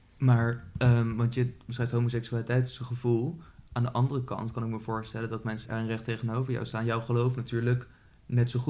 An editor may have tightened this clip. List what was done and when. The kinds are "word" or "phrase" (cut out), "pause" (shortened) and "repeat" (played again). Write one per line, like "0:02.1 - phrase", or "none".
0:05.6 - word